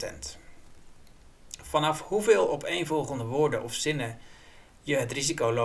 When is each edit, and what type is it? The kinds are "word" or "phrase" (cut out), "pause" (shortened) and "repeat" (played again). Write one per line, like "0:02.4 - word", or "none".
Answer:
none